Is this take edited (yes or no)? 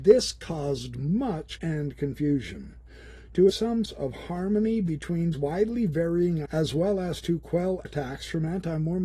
yes